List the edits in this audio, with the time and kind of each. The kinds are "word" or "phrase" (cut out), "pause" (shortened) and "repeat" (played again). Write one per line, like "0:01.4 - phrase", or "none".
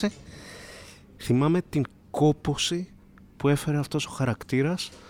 none

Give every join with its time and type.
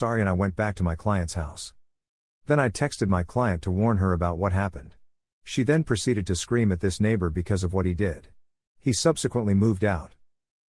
none

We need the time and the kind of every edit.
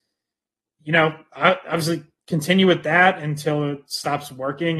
none

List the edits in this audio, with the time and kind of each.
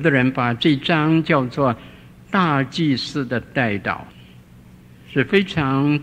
0:04.1 - pause

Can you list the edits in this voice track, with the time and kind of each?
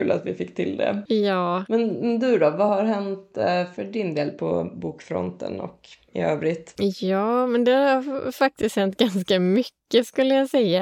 none

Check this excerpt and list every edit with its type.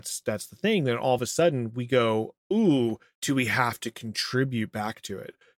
none

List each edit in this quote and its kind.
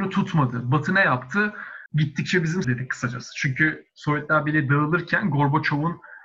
0:01.9 - pause
0:02.6 - phrase

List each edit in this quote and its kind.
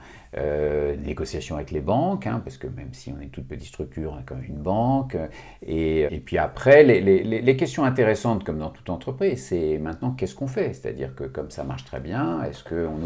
0:06.1 - word

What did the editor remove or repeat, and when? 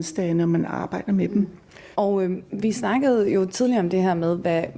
0:01.9 - pause

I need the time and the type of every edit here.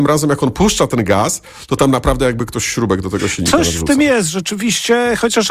none

